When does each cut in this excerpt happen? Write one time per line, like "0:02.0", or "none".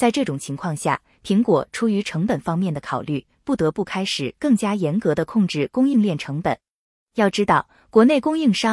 none